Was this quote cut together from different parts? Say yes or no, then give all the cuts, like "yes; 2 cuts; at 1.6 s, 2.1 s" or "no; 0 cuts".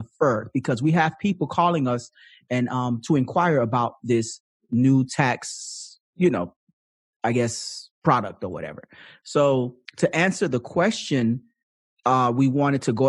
yes; 2 cuts; at 7.9 s, 9.8 s